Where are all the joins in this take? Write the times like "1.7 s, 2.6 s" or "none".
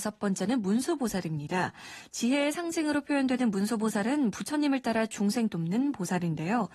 5.5 s